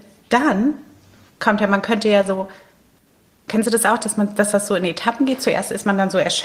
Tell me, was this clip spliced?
no; 0 cuts

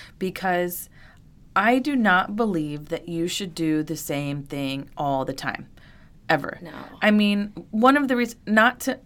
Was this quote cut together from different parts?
no; 0 cuts

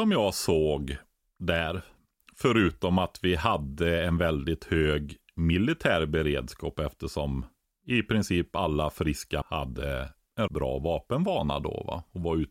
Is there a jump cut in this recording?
yes; 2 cuts; at 9.4 s, 10.5 s

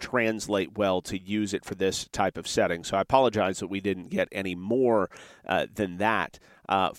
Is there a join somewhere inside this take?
no; 0 cuts

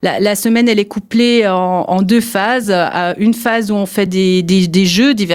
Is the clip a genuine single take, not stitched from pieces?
yes; 0 cuts

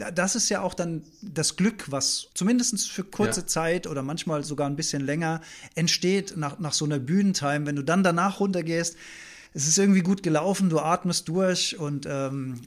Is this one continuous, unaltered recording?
no; 2 cuts; at 2.3 s, 9.5 s

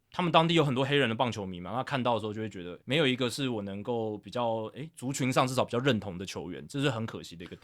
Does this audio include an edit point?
yes; 1 cut; at 2.8 s

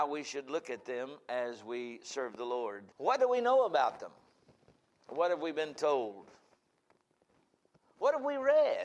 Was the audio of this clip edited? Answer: yes; 1 cut; at 2.9 s

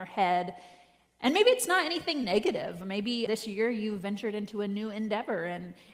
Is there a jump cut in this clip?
yes; 1 cut; at 3.3 s

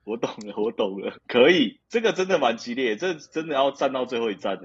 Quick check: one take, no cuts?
no; 1 cut; at 1.2 s

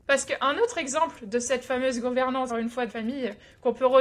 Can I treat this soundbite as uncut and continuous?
no; 2 cuts; at 2.5 s, 2.9 s

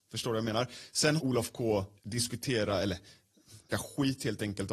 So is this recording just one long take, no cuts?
no; 3 cuts; at 1.2 s, 2.0 s, 3.7 s

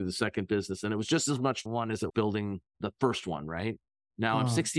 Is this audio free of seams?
no; 3 cuts; at 1.7 s, 2.1 s, 2.7 s

